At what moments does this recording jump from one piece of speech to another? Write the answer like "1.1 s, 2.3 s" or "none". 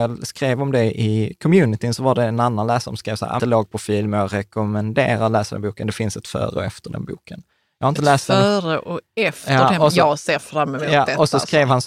3.4 s